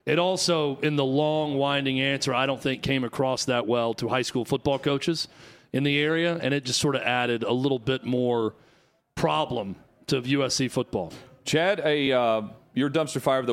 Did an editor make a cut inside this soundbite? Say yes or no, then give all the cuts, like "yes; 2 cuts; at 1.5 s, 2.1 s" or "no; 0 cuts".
no; 0 cuts